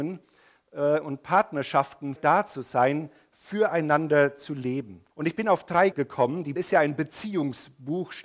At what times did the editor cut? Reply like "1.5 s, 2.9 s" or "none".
2.2 s, 5.1 s, 5.9 s, 6.6 s